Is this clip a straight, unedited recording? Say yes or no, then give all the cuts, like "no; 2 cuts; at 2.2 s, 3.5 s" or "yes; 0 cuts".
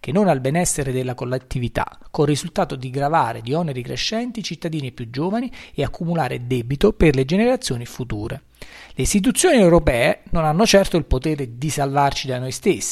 yes; 0 cuts